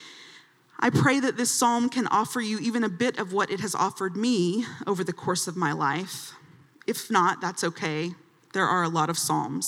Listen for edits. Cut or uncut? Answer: uncut